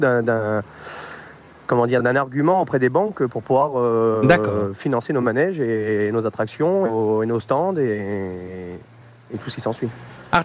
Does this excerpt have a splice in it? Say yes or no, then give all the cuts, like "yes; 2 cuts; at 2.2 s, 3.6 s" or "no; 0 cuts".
no; 0 cuts